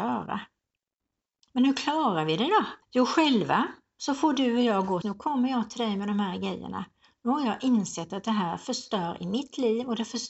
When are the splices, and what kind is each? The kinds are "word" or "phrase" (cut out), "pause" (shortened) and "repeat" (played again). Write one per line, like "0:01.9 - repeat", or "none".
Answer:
0:02.8 - pause
0:05.0 - phrase